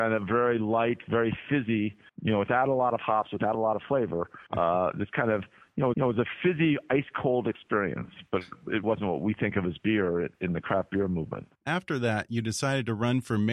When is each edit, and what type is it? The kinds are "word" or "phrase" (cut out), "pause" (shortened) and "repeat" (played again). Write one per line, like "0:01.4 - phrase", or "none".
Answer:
0:02.1 - pause
0:04.5 - pause
0:05.9 - repeat
0:08.8 - word
0:11.6 - pause